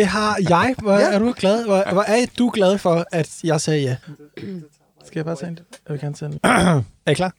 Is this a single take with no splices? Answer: no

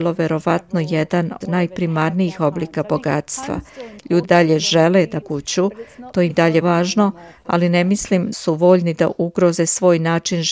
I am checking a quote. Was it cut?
yes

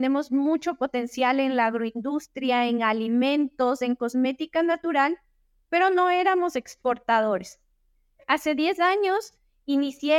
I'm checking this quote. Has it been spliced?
no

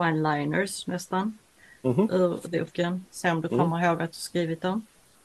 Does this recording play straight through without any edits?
no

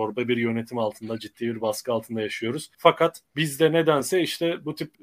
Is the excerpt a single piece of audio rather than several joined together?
yes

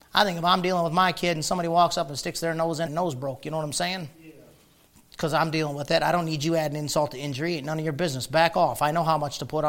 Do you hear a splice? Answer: yes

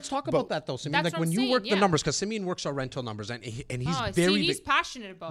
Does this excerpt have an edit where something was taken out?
no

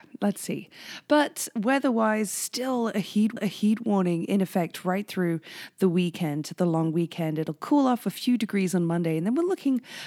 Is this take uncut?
no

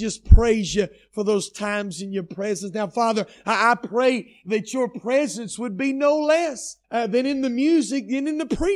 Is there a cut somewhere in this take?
yes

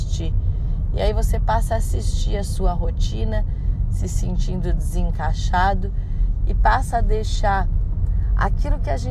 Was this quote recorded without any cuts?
yes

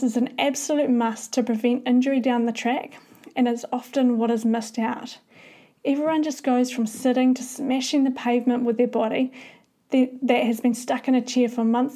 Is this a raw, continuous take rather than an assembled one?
yes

